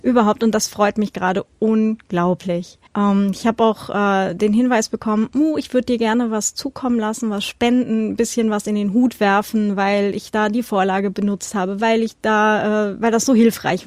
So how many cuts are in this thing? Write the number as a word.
one